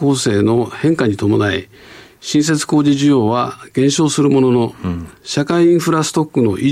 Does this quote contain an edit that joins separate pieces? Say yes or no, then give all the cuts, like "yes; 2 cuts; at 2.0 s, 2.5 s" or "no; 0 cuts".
no; 0 cuts